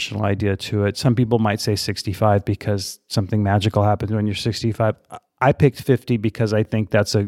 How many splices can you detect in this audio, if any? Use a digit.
0